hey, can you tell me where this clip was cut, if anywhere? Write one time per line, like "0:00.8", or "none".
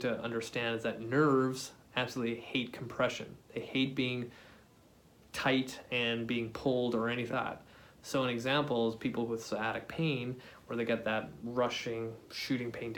0:07.3